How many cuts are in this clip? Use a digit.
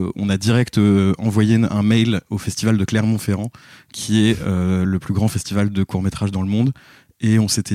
0